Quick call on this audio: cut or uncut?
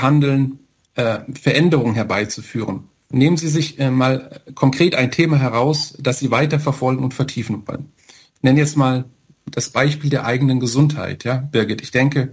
uncut